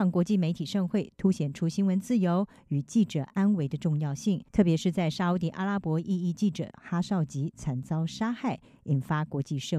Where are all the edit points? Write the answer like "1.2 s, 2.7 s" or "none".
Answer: 4.5 s